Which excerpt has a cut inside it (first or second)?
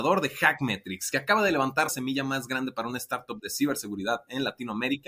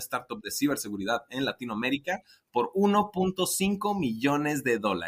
first